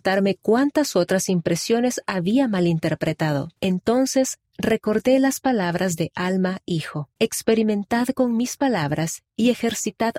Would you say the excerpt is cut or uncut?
cut